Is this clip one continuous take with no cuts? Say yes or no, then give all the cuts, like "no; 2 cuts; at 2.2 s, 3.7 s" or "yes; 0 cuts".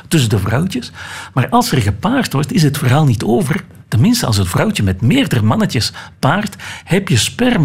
yes; 0 cuts